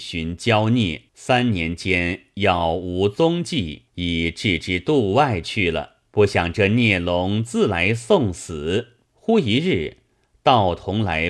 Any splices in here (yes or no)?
yes